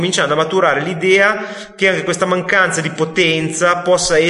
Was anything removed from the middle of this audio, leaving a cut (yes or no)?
no